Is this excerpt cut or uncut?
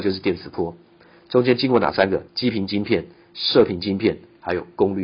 cut